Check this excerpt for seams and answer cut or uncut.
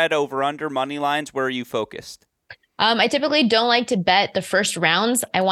uncut